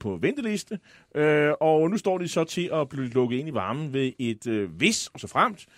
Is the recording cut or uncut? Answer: uncut